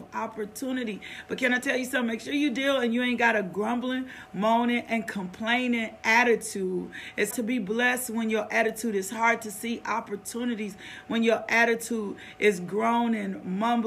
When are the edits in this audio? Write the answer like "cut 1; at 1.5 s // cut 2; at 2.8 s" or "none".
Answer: cut 1; at 7.3 s